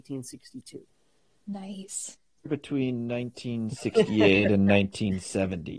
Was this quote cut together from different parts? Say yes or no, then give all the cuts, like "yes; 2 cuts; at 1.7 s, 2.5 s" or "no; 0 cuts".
yes; 1 cut; at 2.5 s